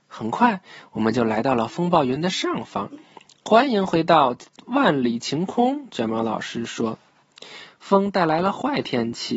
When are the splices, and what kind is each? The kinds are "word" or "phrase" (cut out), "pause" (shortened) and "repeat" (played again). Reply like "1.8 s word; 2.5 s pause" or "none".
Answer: none